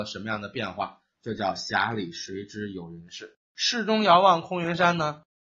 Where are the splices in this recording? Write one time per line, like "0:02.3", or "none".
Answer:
0:03.4